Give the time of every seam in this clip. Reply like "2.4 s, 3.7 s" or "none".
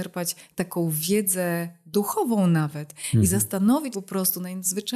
3.9 s

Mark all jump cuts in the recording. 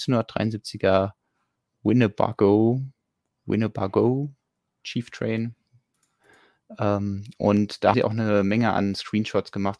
7.9 s

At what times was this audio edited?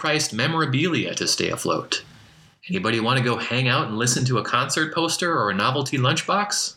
none

